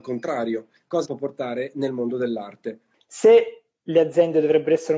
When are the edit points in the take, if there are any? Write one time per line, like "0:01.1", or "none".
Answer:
0:01.0